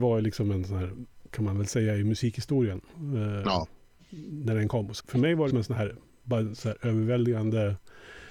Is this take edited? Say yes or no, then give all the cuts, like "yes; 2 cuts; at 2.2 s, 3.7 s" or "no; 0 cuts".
yes; 3 cuts; at 1.3 s, 5.0 s, 5.5 s